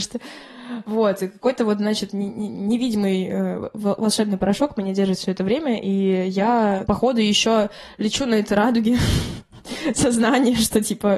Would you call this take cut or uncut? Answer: uncut